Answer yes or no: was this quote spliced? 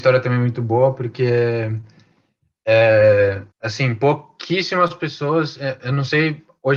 yes